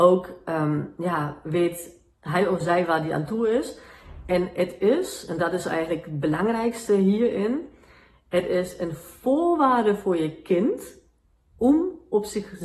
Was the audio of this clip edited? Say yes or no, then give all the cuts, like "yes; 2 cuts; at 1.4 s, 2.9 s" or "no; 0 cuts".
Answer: no; 0 cuts